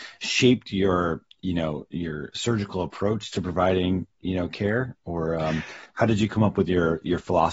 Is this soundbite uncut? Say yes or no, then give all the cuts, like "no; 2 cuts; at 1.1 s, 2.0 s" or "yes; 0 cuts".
yes; 0 cuts